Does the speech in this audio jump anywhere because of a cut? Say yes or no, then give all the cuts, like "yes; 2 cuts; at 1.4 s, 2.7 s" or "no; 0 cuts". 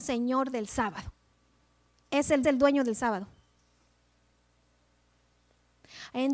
yes; 1 cut; at 2.4 s